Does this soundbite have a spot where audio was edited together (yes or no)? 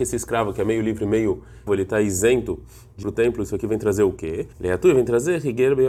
yes